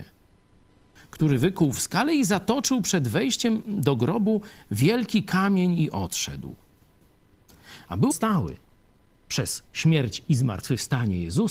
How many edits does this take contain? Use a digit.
0